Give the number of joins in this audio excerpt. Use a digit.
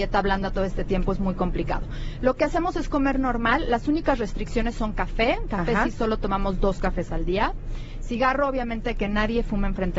0